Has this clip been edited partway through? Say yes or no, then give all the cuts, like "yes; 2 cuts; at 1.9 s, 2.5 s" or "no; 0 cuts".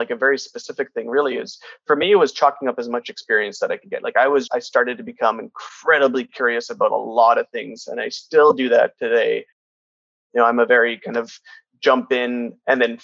yes; 1 cut; at 4.5 s